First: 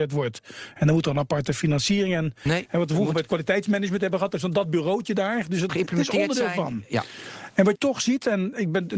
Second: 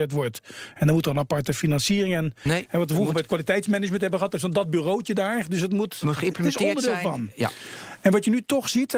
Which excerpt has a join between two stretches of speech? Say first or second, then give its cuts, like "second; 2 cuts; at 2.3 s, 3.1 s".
first; 2 cuts; at 5.7 s, 7.8 s